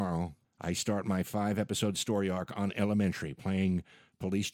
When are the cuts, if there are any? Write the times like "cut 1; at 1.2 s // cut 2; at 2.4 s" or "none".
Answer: none